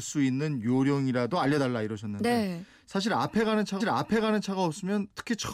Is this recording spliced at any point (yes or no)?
yes